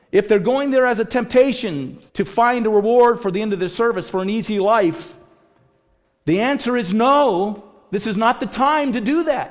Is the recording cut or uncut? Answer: cut